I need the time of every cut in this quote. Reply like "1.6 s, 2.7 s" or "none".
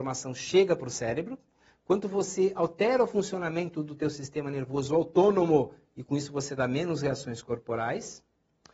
none